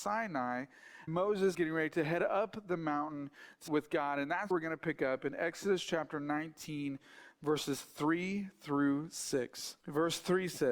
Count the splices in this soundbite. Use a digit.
5